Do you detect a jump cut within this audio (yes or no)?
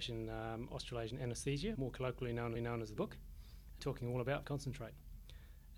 yes